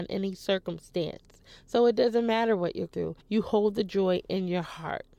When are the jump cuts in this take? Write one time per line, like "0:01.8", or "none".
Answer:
0:02.9
0:03.2